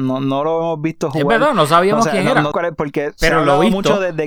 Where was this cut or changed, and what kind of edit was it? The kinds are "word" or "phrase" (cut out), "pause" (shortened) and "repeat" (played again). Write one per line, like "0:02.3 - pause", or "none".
0:02.5 - word